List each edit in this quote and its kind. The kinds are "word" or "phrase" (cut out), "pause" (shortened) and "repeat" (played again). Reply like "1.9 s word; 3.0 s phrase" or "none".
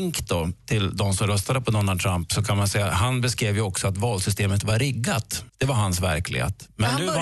5.5 s pause